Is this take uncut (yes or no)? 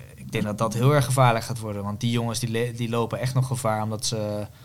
yes